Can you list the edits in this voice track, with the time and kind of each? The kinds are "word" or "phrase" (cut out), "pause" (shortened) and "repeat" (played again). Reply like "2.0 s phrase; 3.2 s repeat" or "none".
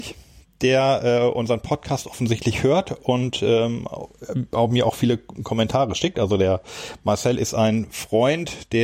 none

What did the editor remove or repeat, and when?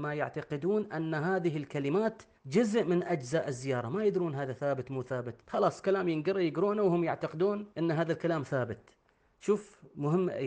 2.4 s pause; 5.4 s pause; 7.7 s pause

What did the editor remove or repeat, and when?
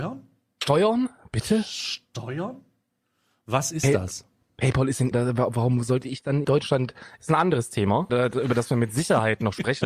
5.1 s word; 6.4 s word; 8.1 s word

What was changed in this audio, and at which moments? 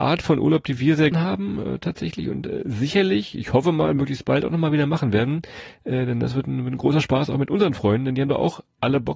1.1 s word

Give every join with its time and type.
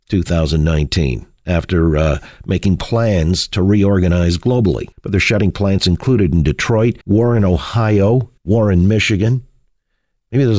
4.9 s pause; 7.0 s pause; 8.4 s pause

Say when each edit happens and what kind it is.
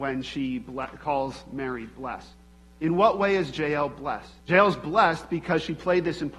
4.4 s pause

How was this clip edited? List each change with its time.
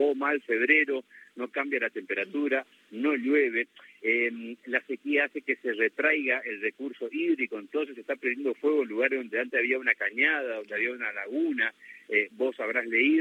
none

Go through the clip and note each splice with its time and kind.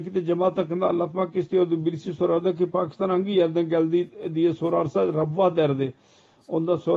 none

